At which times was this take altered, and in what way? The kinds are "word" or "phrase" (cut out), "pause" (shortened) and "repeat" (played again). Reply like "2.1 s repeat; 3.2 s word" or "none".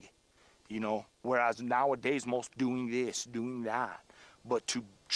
2.5 s phrase

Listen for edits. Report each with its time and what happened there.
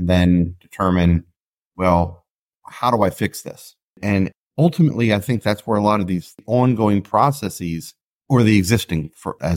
none

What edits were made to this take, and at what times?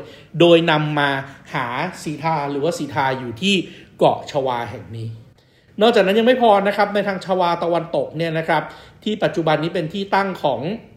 none

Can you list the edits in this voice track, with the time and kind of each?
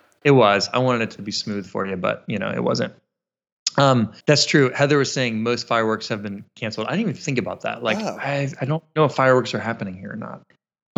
4.2 s pause

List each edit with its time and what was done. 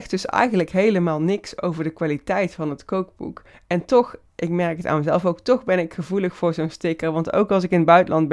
3.5 s pause

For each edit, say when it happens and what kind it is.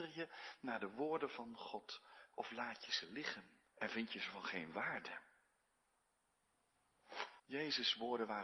3.7 s pause; 7.4 s pause

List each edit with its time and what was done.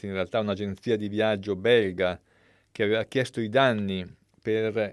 none

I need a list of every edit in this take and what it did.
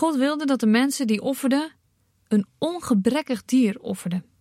none

